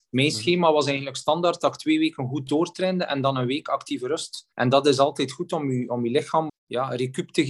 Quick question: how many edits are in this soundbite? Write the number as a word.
two